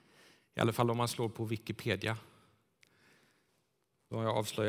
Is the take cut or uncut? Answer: uncut